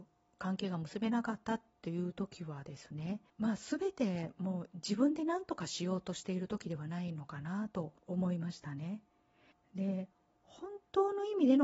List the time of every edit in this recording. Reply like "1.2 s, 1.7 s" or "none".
3.3 s, 8.0 s, 9.5 s